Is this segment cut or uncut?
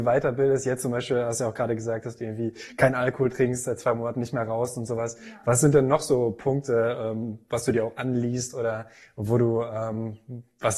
uncut